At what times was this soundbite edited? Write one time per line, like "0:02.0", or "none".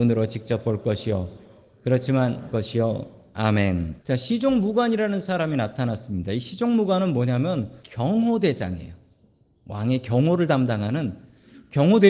0:02.5
0:04.0
0:07.8